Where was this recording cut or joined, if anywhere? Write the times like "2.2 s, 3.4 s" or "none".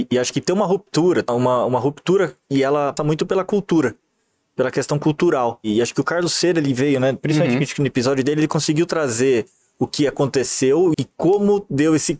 1.3 s, 3.0 s, 10.9 s